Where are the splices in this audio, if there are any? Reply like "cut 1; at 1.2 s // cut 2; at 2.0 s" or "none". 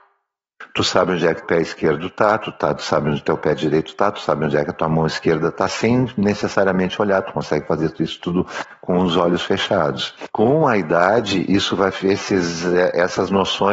cut 1; at 1.4 s // cut 2; at 10.3 s